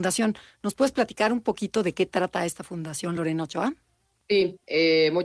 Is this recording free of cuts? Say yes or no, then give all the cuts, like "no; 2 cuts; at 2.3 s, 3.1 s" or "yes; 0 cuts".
yes; 0 cuts